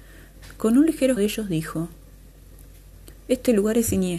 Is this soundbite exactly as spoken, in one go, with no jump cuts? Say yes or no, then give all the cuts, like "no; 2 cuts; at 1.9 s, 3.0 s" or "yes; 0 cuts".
no; 1 cut; at 1.2 s